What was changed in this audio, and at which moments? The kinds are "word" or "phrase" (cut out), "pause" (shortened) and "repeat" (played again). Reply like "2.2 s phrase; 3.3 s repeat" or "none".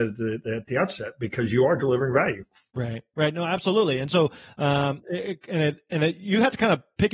none